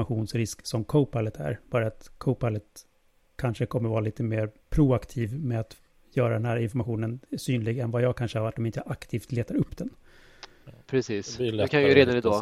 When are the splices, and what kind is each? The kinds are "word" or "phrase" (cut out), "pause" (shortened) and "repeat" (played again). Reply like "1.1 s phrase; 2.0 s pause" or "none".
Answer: 2.2 s pause; 4.6 s pause; 5.9 s pause; 7.3 s pause